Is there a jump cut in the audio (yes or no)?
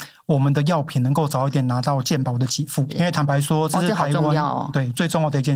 yes